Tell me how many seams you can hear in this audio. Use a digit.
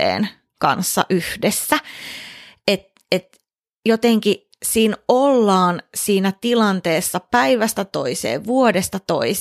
0